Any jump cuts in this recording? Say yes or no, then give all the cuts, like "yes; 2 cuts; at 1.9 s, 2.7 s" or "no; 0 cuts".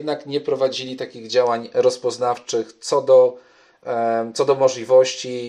no; 0 cuts